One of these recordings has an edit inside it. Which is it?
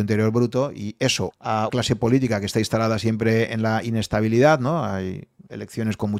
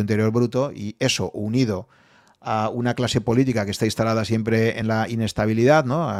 first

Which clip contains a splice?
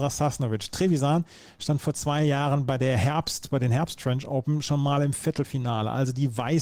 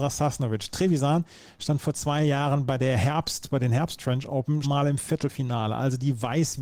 second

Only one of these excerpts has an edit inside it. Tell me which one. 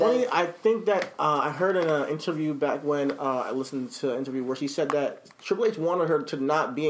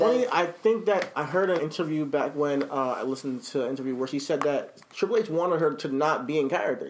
second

